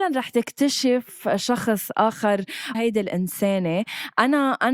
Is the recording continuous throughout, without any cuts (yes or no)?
no